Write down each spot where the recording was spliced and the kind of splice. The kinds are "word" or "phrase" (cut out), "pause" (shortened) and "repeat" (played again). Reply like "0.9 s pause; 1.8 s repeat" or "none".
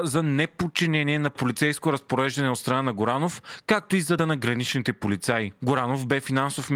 4.2 s word